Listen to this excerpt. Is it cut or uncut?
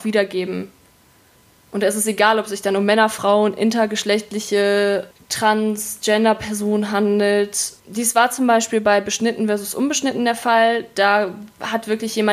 cut